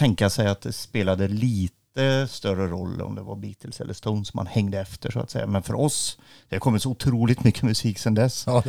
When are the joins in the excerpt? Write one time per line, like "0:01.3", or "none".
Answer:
none

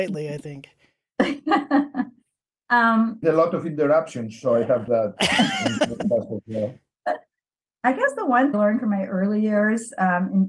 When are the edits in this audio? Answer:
0:03.2
0:04.9
0:07.7
0:08.5

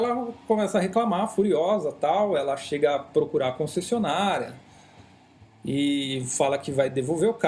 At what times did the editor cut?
0:05.4

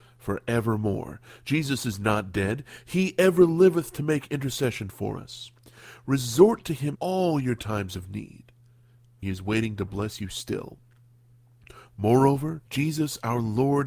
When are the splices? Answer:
0:06.9
0:09.2
0:12.7

